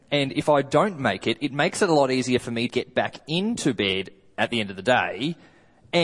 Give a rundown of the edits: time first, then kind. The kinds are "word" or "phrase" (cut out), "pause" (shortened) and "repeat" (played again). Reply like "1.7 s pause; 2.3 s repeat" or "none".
2.7 s word